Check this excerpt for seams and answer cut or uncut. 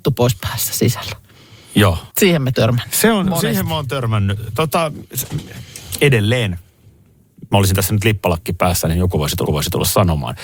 cut